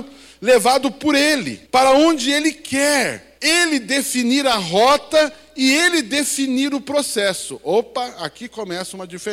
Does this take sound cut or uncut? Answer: cut